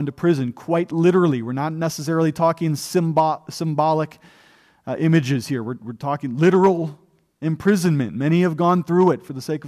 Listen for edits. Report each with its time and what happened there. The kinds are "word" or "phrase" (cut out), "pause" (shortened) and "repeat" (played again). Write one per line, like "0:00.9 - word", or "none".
none

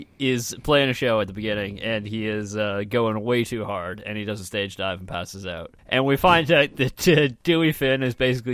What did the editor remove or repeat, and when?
0:05.8 - pause

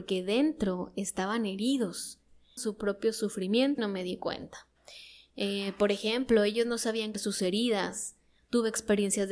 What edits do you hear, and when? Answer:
0:02.6 - word
0:03.8 - word
0:07.1 - word

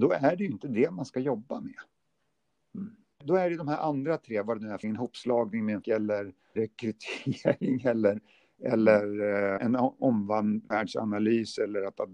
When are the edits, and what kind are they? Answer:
0:03.2 - word
0:04.8 - word
0:05.8 - word
0:06.6 - word
0:09.6 - word

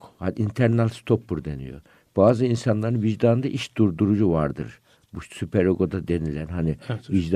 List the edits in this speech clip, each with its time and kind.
none

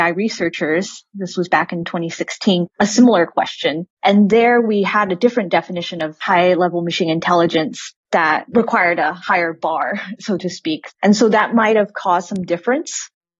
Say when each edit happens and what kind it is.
0:10.9 - pause

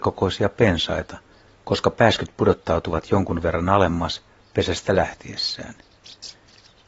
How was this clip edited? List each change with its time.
none

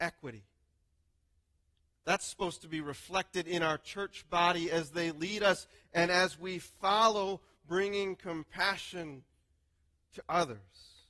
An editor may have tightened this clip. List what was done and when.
none

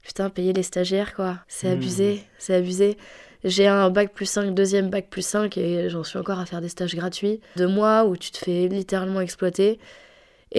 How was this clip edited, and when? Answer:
0:01.4 - pause
0:07.6 - word

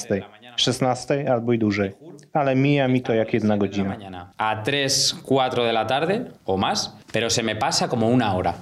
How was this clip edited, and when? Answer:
0:04.3 - pause
0:06.4 - pause
0:07.0 - pause

